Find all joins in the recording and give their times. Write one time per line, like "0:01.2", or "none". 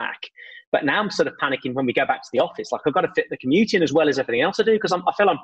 none